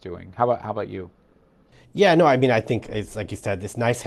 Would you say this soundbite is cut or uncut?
uncut